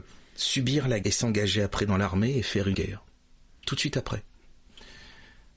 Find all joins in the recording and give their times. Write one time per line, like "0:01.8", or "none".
0:01.0
0:02.7

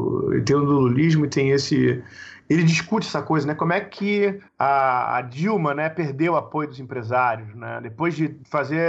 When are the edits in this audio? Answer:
none

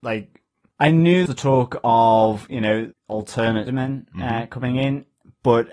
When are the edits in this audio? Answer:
0:01.3
0:02.9
0:03.7

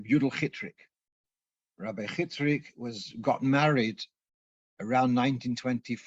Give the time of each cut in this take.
none

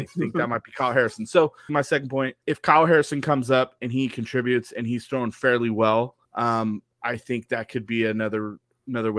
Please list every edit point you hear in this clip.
0:01.7
0:02.4
0:06.2

